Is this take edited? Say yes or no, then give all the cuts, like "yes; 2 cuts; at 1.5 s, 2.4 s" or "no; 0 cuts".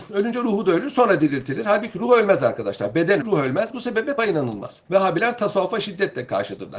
yes; 3 cuts; at 3.2 s, 4.2 s, 4.8 s